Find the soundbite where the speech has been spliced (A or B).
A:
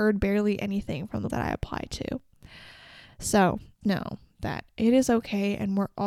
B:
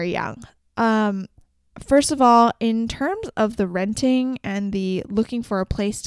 A